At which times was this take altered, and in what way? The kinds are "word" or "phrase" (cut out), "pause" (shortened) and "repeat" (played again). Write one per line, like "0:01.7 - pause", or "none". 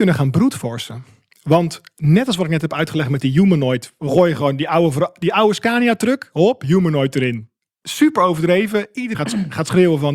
0:09.1 - word